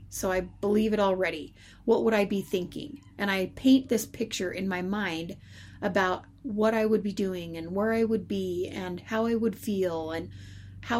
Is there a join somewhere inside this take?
yes; 1 cut; at 3.1 s

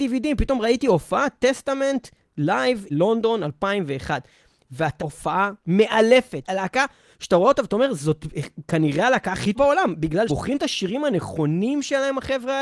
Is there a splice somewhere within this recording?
yes; 6 cuts; at 2.9 s, 5.0 s, 5.6 s, 6.4 s, 9.5 s, 10.3 s

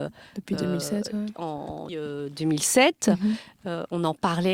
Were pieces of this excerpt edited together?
yes; 1 cut; at 1.9 s

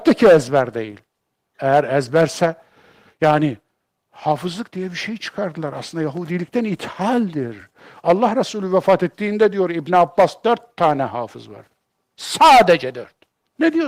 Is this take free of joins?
yes; 0 cuts

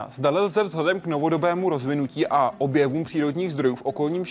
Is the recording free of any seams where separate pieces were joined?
yes; 0 cuts

